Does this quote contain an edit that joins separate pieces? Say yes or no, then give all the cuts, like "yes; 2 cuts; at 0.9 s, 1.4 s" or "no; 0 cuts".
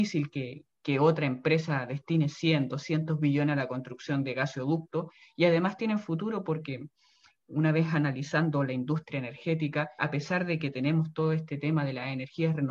no; 0 cuts